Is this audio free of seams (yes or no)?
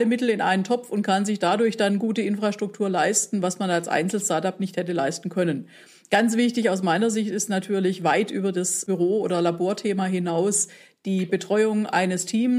yes